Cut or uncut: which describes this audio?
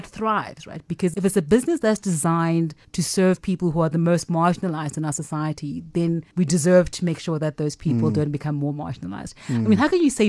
uncut